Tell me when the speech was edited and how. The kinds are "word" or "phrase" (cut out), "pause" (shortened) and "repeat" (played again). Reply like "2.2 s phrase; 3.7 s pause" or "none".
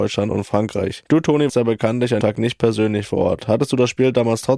1.1 s pause; 1.5 s word; 2.2 s word

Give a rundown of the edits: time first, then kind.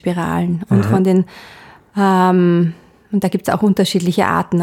none

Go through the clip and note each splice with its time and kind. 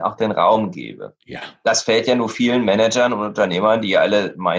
1.2 s pause

